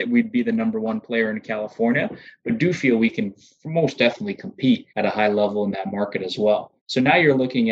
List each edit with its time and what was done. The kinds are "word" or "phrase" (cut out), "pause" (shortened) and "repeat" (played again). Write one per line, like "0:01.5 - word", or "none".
0:04.9 - pause
0:06.8 - pause